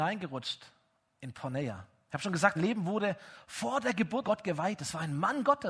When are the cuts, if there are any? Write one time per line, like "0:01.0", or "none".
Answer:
0:02.6
0:04.2